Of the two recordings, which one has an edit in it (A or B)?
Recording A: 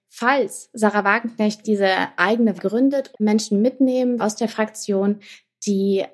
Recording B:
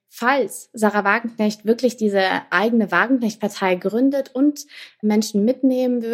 A